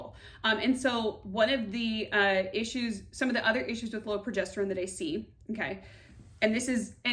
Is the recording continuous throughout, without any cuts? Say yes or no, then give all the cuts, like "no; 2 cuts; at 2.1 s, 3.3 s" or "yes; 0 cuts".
yes; 0 cuts